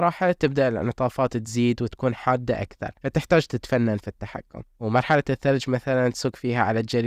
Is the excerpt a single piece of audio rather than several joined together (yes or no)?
yes